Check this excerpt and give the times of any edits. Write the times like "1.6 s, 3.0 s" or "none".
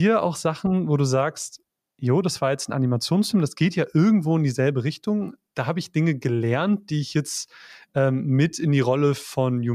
none